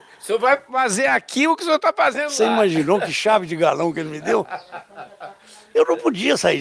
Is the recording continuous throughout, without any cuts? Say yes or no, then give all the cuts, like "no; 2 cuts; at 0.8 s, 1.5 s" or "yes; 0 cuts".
yes; 0 cuts